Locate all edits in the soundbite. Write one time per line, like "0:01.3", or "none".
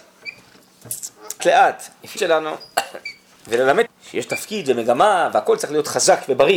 0:01.4
0:02.2
0:03.9